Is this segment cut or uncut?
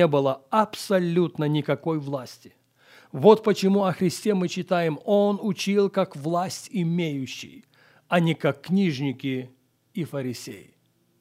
uncut